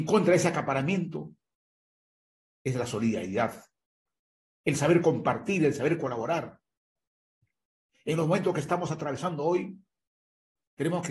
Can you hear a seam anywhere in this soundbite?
no; 0 cuts

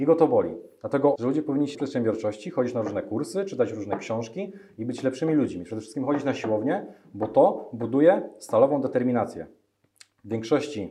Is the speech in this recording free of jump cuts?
no; 2 cuts; at 1.2 s, 1.7 s

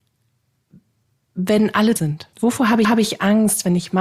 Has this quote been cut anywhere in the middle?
yes; 3 cuts; at 2.0 s, 2.3 s, 2.8 s

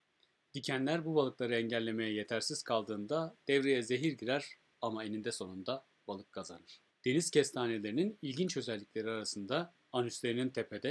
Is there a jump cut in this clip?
yes; 1 cut; at 6.9 s

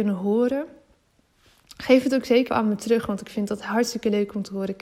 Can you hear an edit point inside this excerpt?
yes; 1 cut; at 2.5 s

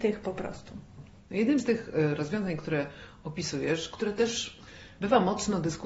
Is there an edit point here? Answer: no; 0 cuts

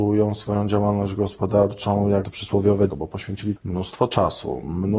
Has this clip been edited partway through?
yes; 3 cuts; at 2.2 s, 2.9 s, 3.6 s

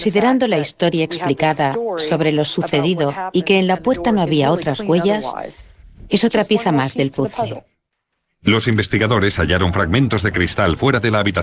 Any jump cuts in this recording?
yes; 1 cut; at 7.9 s

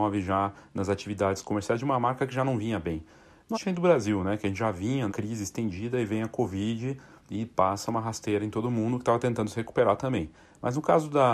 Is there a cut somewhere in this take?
yes; 2 cuts; at 3.5 s, 5.1 s

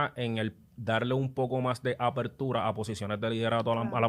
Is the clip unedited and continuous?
yes; 0 cuts

